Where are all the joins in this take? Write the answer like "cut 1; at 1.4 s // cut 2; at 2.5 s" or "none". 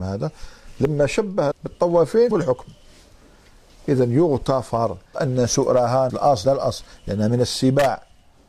cut 1; at 1.5 s // cut 2; at 2.3 s // cut 3; at 5.1 s // cut 4; at 6.1 s // cut 5; at 6.4 s